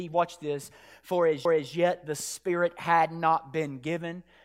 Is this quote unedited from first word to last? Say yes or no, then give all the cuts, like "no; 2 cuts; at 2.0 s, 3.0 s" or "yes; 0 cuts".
no; 1 cut; at 1.5 s